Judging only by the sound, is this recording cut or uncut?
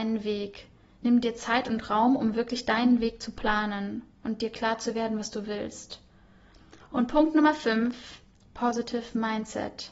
uncut